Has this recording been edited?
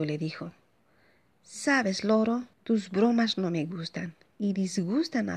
yes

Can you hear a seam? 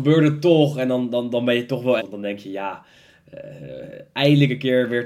yes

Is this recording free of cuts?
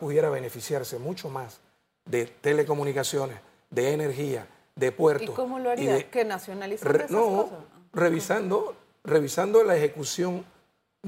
yes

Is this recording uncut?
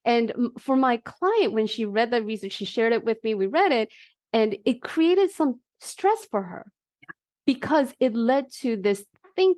yes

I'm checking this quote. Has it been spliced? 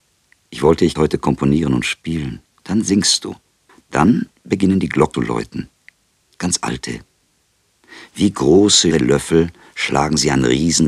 yes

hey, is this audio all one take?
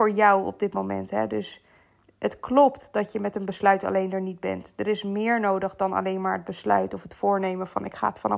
yes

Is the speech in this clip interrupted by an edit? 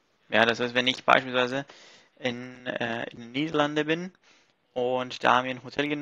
no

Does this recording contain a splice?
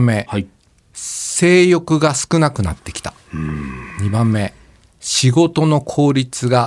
no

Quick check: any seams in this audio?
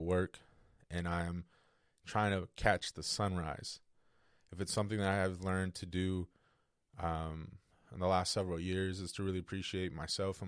no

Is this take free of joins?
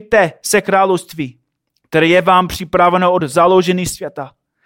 yes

